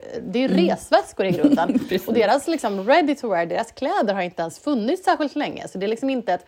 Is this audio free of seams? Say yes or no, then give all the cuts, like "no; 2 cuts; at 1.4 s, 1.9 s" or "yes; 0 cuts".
yes; 0 cuts